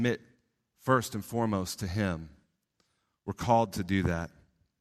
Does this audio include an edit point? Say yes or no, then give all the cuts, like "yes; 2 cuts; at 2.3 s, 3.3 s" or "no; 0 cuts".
no; 0 cuts